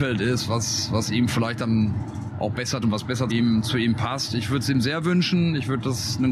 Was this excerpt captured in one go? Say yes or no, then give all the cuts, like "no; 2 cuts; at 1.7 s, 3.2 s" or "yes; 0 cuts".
no; 2 cuts; at 2.8 s, 3.3 s